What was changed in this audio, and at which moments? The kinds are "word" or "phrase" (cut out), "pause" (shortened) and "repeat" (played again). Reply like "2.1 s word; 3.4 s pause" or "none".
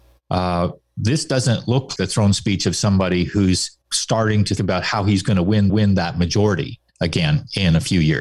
2.0 s word; 3.8 s pause; 4.6 s word; 5.7 s repeat; 6.9 s pause

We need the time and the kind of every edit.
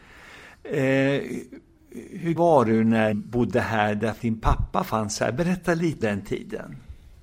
2.4 s word; 3.1 s word; 4.2 s word; 6.0 s word

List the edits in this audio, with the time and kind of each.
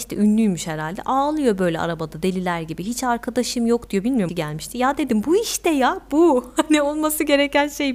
4.3 s phrase

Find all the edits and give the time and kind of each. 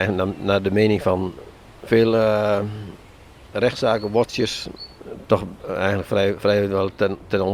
none

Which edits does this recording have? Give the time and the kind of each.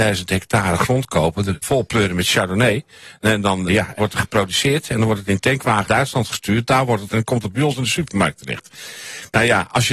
1.6 s word; 3.7 s word; 4.0 s word; 5.9 s word; 7.1 s word

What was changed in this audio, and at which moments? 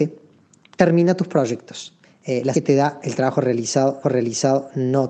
2.0 s pause; 2.5 s word; 4.0 s repeat

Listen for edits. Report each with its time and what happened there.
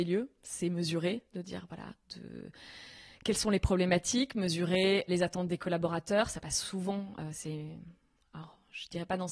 5.1 s word

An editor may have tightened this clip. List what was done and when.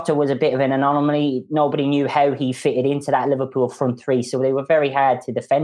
none

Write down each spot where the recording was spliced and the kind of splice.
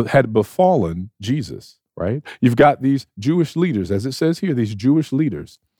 1.9 s pause

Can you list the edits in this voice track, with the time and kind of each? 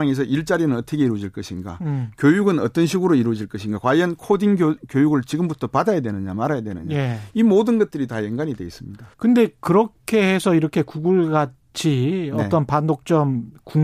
9.1 s pause

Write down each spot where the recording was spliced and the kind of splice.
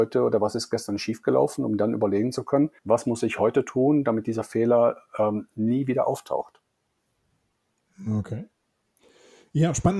2.8 s pause

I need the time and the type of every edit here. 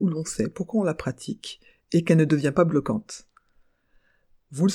none

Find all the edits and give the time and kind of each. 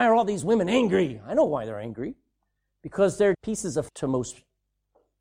3.3 s word; 3.9 s word

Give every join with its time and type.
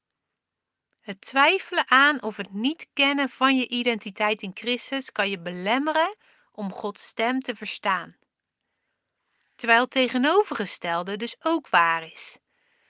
none

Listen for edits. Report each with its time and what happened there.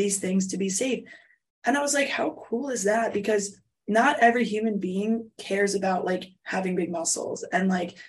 none

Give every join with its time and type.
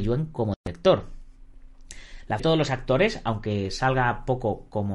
2.4 s phrase

